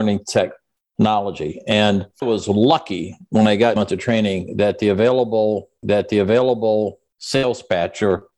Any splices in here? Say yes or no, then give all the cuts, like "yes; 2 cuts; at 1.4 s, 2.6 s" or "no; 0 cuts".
yes; 3 cuts; at 2.2 s, 3.8 s, 5.8 s